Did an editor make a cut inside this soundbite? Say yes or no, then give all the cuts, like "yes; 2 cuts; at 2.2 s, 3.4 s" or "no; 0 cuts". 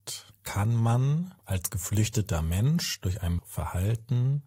yes; 1 cut; at 3.4 s